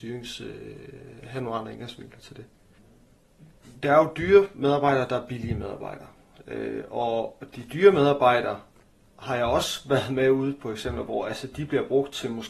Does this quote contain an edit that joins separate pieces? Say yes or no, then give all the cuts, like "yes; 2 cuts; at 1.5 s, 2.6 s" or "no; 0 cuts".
no; 0 cuts